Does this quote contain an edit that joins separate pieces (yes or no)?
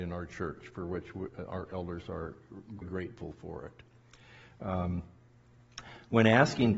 yes